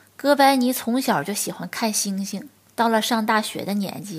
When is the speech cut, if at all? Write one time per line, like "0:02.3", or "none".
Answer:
0:02.7